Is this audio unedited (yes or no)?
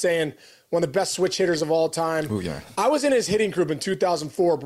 yes